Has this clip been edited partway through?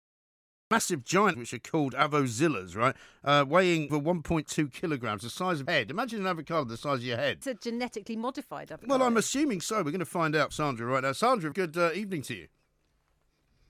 yes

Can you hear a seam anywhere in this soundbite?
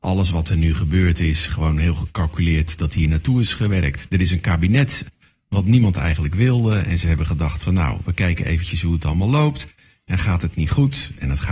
no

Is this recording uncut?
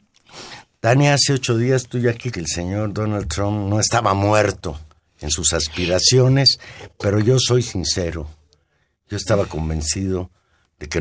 no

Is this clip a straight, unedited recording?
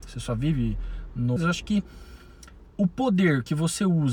no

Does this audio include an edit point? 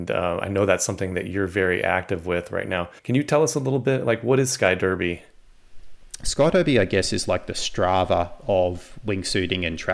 yes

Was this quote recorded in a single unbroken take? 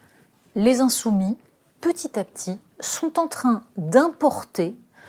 yes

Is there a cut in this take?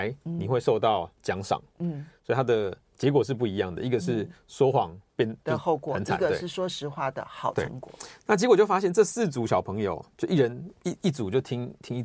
yes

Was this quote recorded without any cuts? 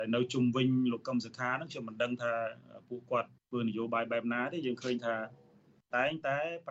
no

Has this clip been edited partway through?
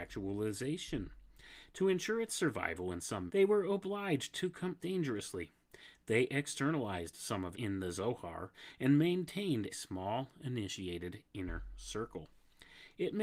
yes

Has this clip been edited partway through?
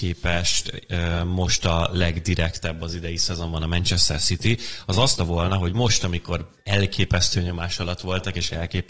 yes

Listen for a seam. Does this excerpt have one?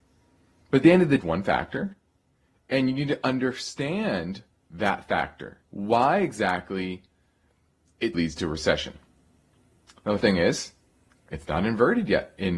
yes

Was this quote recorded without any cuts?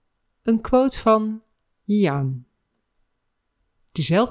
yes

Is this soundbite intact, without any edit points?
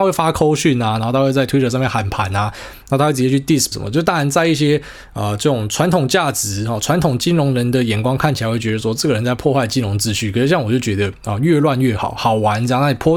no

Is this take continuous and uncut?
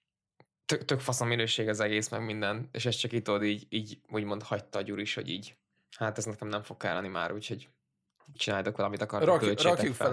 yes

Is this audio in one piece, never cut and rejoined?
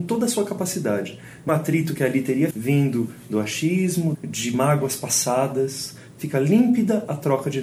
no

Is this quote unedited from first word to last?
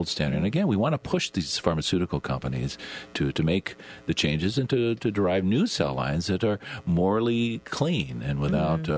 yes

